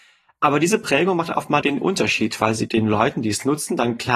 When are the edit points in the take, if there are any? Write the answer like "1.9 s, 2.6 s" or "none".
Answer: 1.6 s, 2.7 s